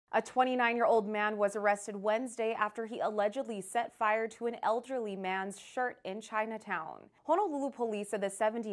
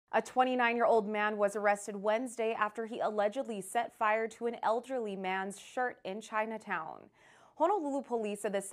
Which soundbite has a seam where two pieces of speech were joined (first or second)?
first